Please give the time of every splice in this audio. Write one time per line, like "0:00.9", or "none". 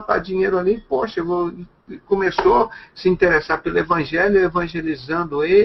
none